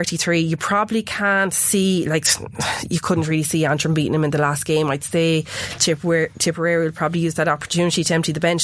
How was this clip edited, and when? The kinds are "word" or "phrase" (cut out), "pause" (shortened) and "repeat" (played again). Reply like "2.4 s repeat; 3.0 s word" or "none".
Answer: none